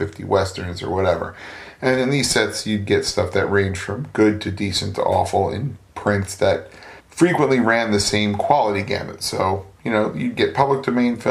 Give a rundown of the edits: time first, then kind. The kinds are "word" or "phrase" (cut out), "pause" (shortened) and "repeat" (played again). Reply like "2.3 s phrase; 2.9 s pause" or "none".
5.9 s pause; 7.0 s pause